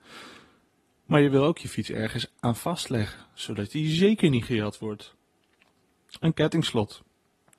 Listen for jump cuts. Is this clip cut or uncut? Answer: uncut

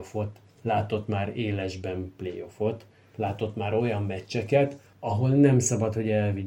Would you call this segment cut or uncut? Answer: uncut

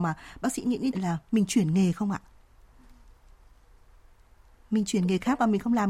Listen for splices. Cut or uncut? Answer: cut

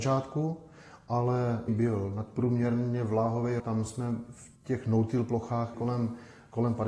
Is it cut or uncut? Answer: cut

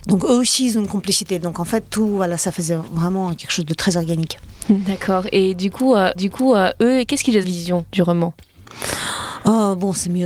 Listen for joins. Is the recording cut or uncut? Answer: cut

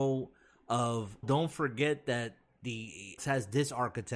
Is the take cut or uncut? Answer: cut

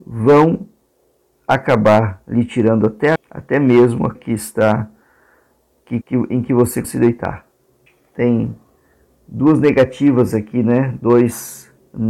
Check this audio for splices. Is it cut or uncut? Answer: cut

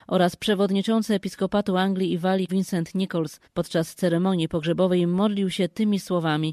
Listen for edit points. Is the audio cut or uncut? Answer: cut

